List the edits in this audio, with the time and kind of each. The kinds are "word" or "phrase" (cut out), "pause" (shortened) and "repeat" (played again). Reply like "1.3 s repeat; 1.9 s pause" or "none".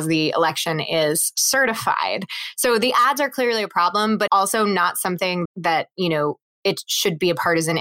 4.3 s word; 5.5 s word